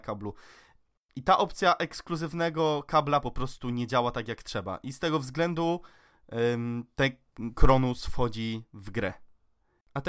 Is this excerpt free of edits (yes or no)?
yes